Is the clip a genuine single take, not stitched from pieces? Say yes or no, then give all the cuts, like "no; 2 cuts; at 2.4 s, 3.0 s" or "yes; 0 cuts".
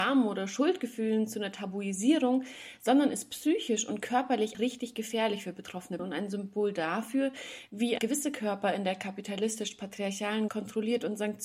no; 4 cuts; at 4.5 s, 6.0 s, 8.0 s, 10.5 s